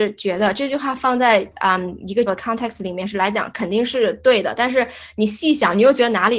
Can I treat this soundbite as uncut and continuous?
no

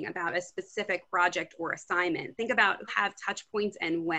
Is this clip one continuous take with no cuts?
no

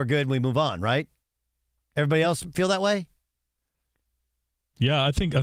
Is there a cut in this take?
no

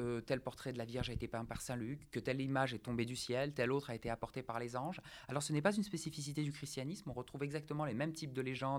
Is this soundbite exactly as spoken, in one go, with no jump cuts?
yes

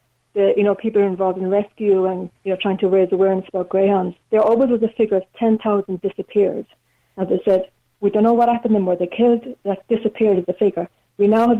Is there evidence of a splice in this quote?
yes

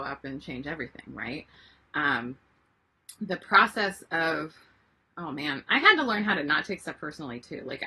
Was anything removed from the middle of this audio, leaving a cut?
no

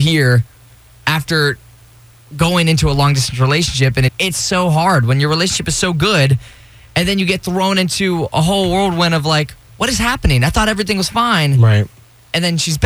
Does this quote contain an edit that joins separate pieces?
yes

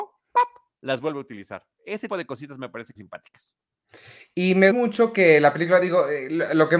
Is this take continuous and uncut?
no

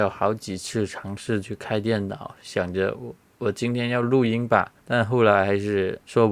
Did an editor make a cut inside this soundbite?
yes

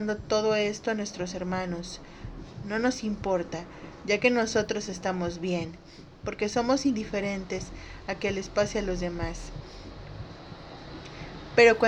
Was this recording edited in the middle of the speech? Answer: no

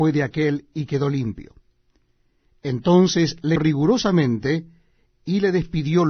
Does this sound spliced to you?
yes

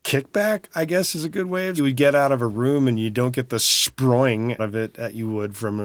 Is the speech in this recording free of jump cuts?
no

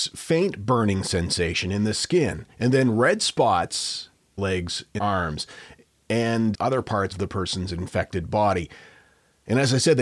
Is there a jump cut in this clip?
yes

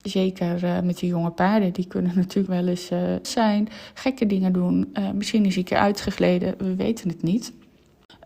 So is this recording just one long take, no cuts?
no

